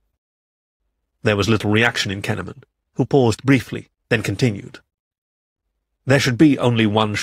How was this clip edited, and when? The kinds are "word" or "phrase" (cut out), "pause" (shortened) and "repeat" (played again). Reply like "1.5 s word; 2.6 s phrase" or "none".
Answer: none